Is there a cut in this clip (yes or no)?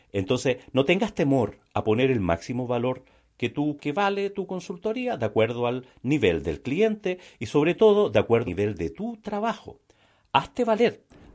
yes